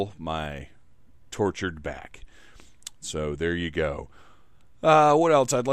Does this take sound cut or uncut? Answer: uncut